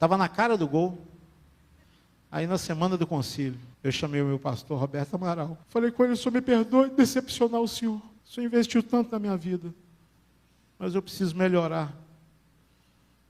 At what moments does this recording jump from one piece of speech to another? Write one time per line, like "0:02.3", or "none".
0:01.8
0:03.7
0:05.6
0:08.2